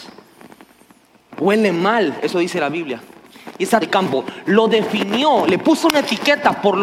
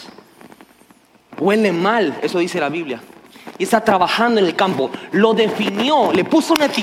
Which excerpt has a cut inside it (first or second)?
first